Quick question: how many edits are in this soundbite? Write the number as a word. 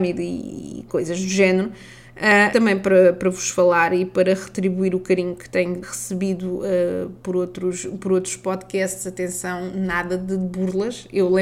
two